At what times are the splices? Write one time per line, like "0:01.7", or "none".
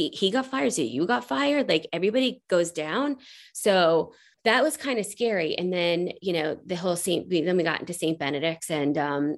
0:04.3